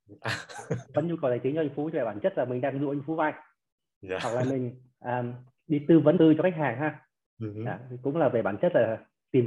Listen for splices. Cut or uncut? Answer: cut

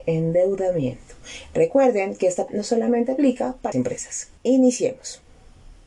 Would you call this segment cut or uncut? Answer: cut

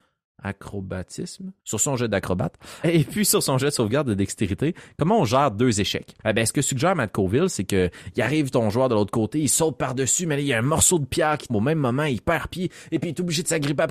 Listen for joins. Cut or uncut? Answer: cut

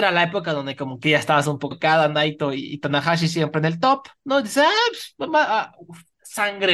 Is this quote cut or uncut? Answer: cut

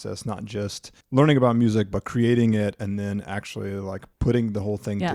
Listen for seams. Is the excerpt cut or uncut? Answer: cut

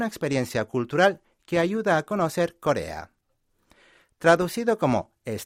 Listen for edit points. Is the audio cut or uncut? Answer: uncut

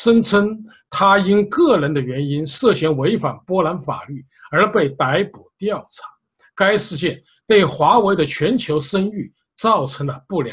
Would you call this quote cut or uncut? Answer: uncut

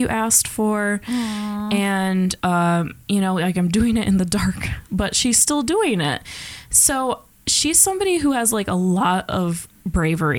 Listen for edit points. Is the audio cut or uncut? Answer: cut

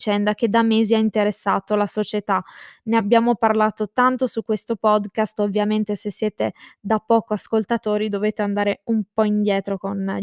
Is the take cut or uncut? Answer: uncut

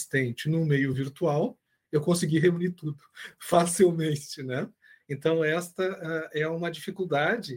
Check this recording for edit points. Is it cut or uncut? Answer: uncut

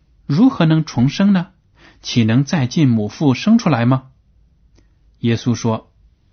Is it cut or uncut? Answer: uncut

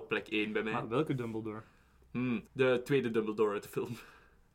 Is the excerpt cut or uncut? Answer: cut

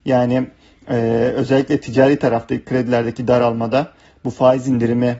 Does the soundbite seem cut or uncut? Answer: uncut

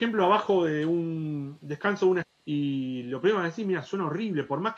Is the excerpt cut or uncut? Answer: cut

